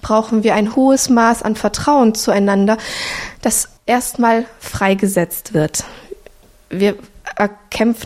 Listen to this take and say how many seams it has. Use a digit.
1